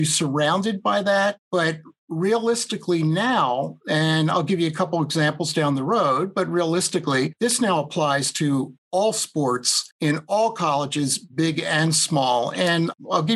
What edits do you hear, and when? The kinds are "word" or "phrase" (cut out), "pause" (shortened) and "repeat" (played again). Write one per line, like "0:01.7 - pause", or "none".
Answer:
0:08.8 - pause
0:09.9 - pause